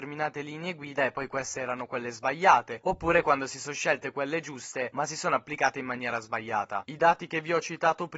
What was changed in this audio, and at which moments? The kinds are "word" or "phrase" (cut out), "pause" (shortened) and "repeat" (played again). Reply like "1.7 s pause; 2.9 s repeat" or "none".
none